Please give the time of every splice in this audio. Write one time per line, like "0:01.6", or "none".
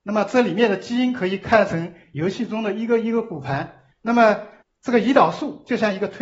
0:03.9
0:04.6